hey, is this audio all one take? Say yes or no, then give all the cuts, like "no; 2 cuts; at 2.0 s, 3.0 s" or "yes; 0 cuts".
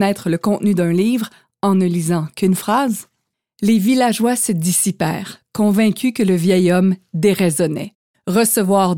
yes; 0 cuts